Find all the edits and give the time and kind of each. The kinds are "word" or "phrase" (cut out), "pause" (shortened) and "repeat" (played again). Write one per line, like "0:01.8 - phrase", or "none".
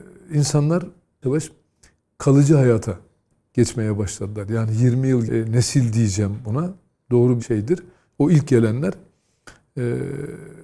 0:01.2 - word
0:05.3 - phrase
0:07.4 - word